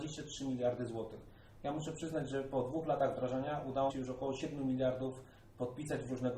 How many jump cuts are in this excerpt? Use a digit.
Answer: 1